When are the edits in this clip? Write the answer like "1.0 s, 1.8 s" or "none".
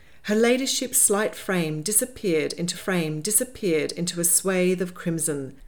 2.7 s